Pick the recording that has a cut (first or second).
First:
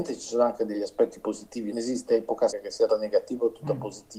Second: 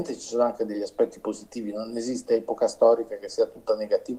first